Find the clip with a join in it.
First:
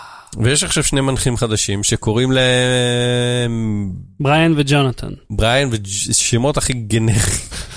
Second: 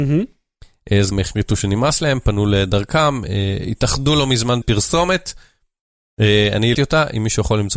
second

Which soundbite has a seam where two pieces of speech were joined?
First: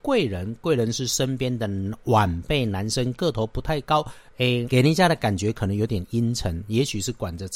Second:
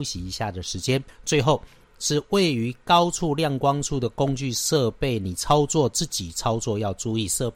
first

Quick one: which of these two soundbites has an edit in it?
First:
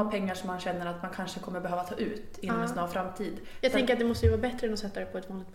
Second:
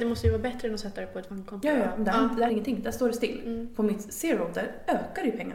second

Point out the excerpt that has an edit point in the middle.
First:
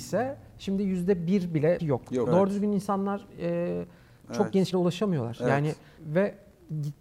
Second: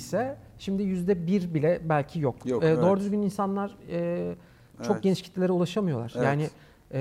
first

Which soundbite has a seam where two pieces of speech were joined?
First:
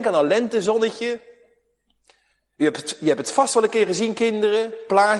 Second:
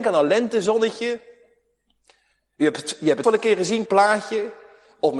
second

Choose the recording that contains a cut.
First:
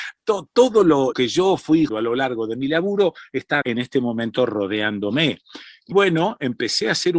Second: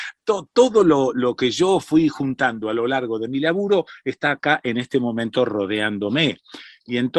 first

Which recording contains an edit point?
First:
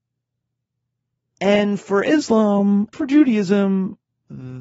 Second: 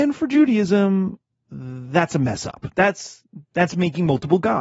first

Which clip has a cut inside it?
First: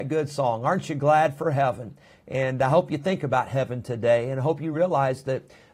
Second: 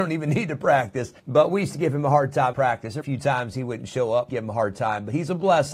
second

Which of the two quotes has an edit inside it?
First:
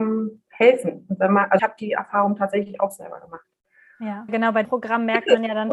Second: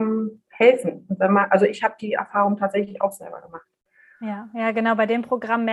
first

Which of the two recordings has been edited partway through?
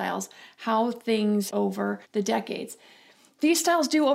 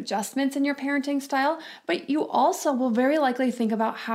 first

